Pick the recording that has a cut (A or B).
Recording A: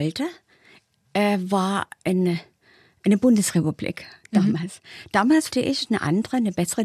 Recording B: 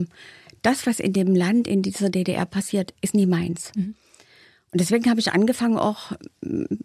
A